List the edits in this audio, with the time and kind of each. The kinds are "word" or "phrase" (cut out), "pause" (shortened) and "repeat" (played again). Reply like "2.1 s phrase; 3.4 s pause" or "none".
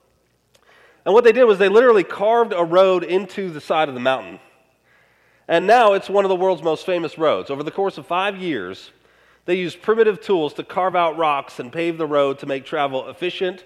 none